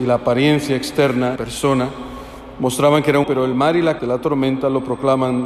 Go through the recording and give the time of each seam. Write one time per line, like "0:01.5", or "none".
0:01.4
0:03.2
0:04.0